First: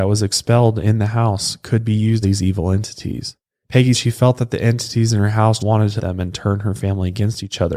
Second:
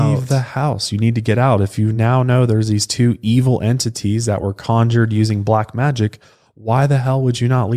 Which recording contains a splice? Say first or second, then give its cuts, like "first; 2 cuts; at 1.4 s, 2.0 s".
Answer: first; 4 cuts; at 2.2 s, 3.9 s, 5.6 s, 6.0 s